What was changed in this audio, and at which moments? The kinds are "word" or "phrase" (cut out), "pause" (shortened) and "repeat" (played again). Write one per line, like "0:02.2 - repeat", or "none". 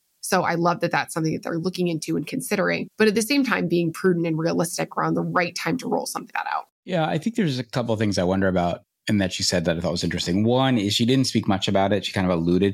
0:02.9 - pause
0:06.3 - word
0:06.7 - pause